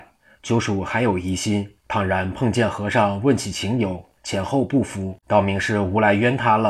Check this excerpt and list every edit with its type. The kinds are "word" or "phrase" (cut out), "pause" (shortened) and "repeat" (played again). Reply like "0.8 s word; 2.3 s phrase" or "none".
1.8 s pause; 4.2 s pause; 5.2 s pause